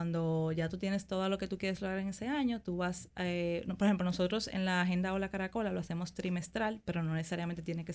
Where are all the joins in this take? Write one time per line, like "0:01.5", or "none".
none